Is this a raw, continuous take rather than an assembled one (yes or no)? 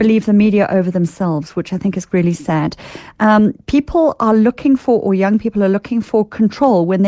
yes